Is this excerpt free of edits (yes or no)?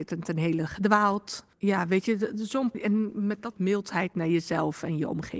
no